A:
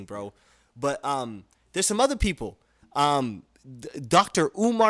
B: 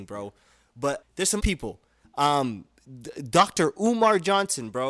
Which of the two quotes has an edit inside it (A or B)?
B